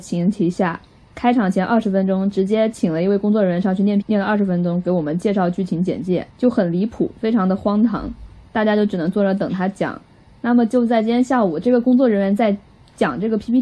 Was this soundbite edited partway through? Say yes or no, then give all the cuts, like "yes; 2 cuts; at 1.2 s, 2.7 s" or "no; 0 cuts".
yes; 1 cut; at 4.0 s